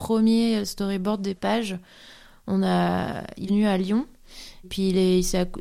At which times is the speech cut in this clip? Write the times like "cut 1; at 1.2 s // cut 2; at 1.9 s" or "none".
cut 1; at 1.4 s // cut 2; at 3.5 s // cut 3; at 4.6 s